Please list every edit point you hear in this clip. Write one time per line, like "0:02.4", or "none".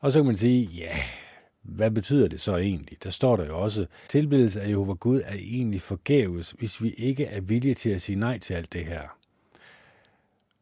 0:01.4
0:04.1